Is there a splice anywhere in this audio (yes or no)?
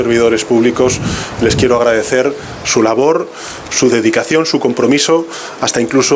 no